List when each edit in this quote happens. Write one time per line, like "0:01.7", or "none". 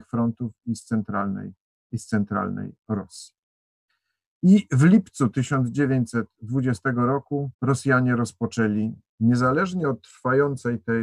0:07.5